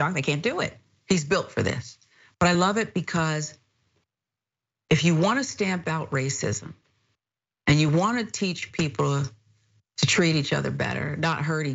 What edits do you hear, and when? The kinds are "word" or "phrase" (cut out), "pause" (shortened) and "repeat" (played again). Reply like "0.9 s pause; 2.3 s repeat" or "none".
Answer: none